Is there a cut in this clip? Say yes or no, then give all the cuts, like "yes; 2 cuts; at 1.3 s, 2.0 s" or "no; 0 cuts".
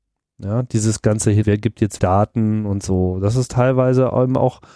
yes; 2 cuts; at 1.4 s, 2.0 s